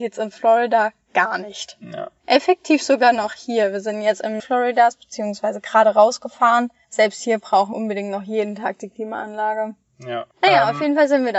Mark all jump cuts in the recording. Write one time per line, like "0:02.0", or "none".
0:04.4
0:07.7
0:10.3